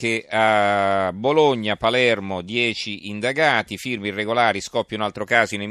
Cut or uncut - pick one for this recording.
uncut